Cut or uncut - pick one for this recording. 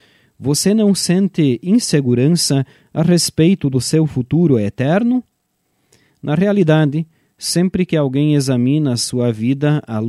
uncut